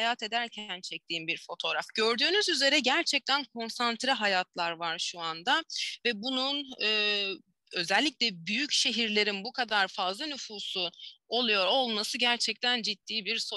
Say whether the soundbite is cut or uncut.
uncut